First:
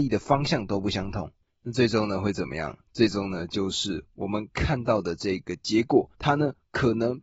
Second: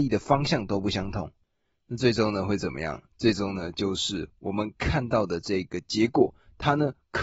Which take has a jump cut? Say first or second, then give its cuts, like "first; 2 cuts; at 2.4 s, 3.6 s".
first; 2 cuts; at 1.5 s, 6.1 s